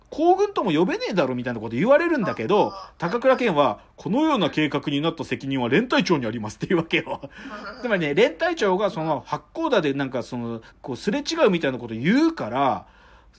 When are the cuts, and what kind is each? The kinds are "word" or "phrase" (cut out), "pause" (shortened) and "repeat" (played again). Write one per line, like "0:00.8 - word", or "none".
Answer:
0:10.7 - pause